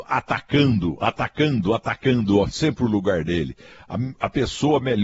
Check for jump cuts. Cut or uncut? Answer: uncut